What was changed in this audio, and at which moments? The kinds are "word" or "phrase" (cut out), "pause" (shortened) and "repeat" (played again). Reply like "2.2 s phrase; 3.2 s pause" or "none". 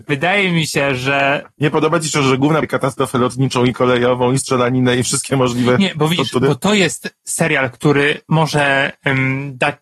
2.6 s phrase